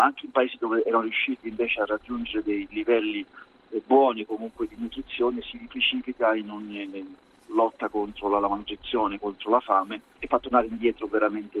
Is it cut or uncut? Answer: cut